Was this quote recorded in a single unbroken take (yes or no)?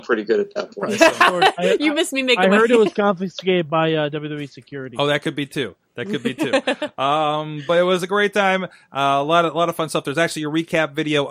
yes